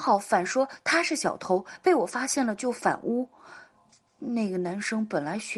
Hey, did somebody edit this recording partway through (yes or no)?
no